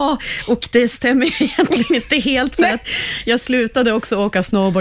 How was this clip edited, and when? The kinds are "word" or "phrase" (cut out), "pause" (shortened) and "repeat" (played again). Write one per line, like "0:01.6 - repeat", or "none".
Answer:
none